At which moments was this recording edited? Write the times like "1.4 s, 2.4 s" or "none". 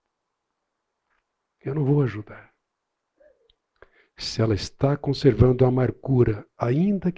none